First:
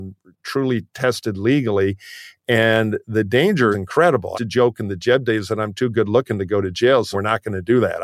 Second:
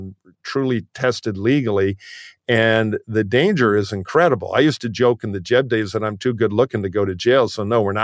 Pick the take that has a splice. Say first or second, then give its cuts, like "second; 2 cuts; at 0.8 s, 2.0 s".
first; 3 cuts; at 3.7 s, 4.3 s, 7.1 s